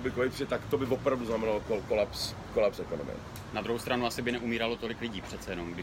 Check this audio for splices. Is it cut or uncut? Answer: uncut